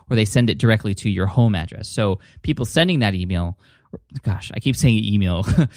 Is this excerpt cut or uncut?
uncut